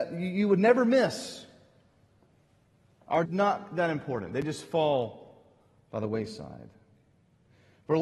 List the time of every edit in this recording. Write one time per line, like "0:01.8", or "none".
0:03.2